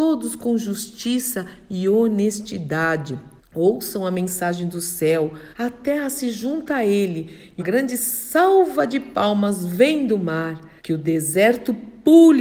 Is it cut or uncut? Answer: cut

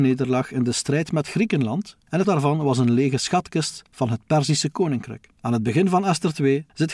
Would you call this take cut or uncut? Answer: cut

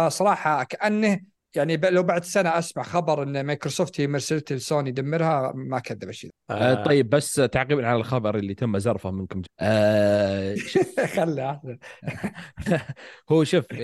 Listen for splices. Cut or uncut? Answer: cut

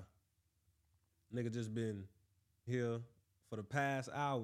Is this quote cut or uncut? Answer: cut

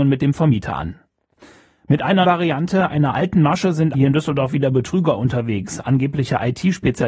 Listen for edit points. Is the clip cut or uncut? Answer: cut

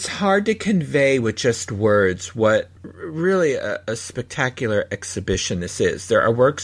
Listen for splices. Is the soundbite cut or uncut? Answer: cut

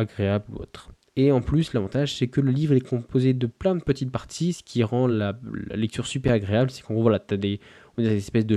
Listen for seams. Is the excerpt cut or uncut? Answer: uncut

